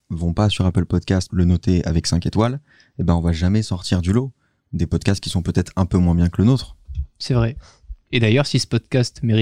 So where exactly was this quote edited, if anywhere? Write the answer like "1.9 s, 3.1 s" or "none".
1.3 s